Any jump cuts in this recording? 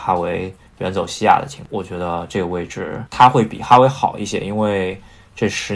no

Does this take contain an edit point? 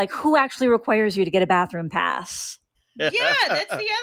yes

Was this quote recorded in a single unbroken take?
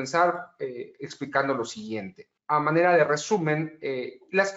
no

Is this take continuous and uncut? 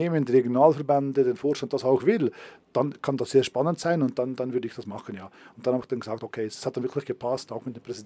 yes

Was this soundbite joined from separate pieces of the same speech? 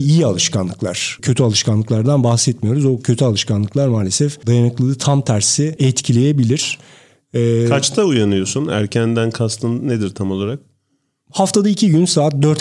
no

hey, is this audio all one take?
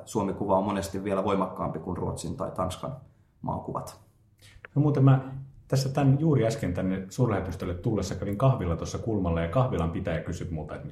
yes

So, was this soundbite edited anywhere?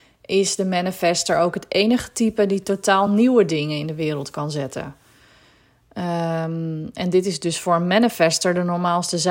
no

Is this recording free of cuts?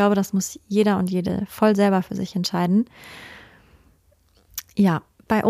yes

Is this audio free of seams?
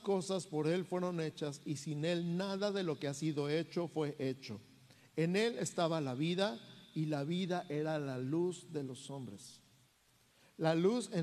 yes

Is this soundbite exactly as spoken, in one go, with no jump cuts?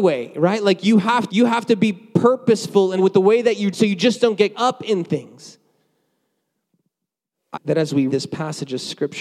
no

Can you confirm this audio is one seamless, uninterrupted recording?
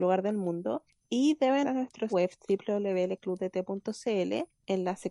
no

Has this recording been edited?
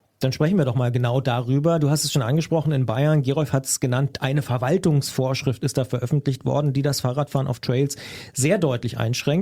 no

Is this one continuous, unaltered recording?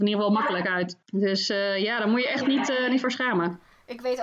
no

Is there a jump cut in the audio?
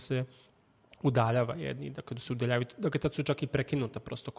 no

